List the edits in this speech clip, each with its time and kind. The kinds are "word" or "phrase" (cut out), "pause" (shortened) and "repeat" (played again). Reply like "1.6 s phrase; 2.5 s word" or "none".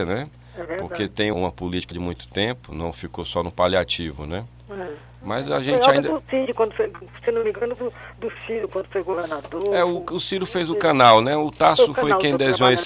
1.3 s word; 1.9 s word; 7.8 s word